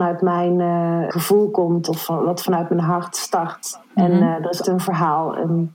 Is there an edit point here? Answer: yes; 3 cuts; at 1.1 s, 3.9 s, 4.6 s

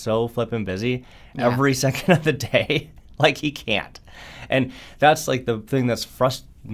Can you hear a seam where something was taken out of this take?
no; 0 cuts

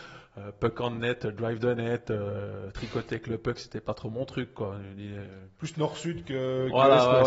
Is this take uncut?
yes; 0 cuts

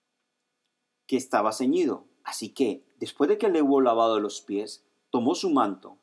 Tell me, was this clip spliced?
no; 0 cuts

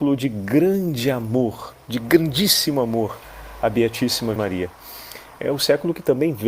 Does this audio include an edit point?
yes; 1 cut; at 4.4 s

